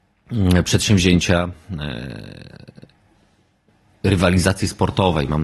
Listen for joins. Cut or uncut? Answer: uncut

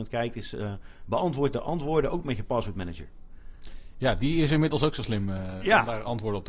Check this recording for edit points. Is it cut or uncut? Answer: uncut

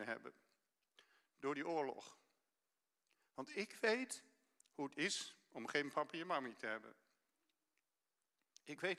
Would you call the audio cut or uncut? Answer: uncut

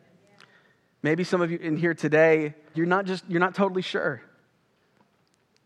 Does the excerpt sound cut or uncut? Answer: cut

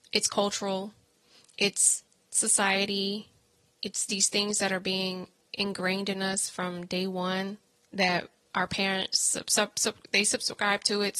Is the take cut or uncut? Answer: uncut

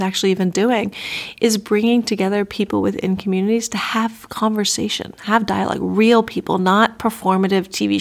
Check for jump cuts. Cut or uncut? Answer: uncut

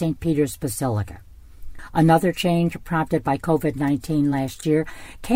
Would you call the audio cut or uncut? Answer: uncut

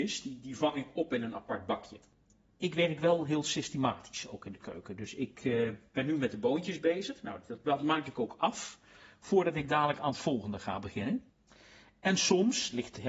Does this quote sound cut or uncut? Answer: uncut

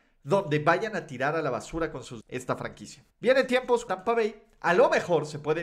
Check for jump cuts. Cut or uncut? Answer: cut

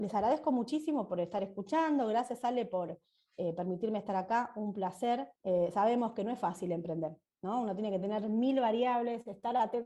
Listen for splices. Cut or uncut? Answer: cut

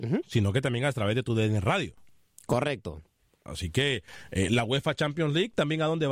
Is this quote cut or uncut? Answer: uncut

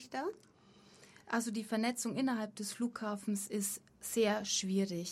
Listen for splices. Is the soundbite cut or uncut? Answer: cut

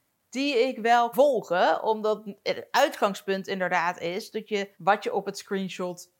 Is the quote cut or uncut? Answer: cut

